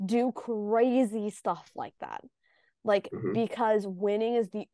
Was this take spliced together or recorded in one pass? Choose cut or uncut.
uncut